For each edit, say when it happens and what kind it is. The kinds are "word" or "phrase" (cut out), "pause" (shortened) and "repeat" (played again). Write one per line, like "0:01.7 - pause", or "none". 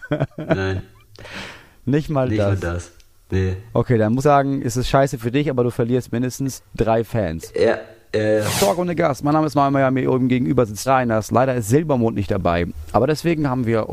0:04.2 - word
0:09.5 - word
0:10.9 - word

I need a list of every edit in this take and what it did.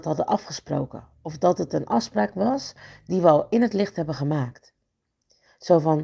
none

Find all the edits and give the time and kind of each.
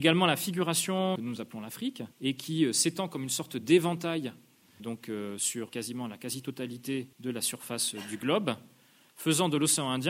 0:01.2 - phrase
0:02.1 - pause
0:04.8 - word
0:05.7 - word
0:07.1 - pause

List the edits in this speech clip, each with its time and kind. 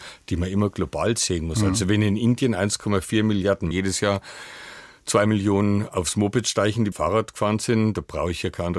0:03.7 - phrase
0:06.9 - word

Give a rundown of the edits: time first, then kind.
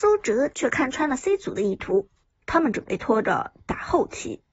0:02.2 - pause

